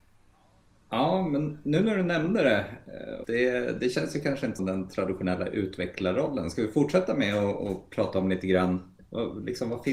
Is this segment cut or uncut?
cut